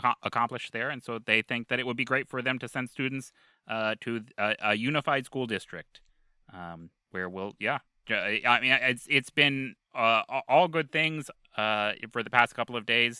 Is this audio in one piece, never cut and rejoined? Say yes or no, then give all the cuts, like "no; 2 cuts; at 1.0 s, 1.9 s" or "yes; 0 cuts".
yes; 0 cuts